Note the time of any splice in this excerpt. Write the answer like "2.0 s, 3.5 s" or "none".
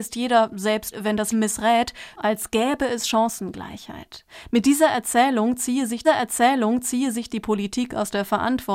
0.9 s, 1.3 s, 2.1 s, 6.0 s